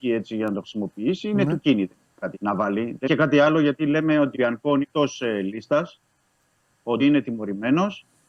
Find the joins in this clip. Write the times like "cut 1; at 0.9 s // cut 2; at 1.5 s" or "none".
cut 1; at 2.3 s // cut 2; at 3.0 s // cut 3; at 4.3 s // cut 4; at 4.8 s // cut 5; at 7.0 s